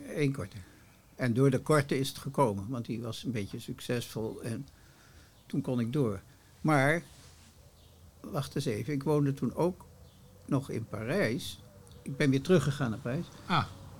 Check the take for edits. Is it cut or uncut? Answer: uncut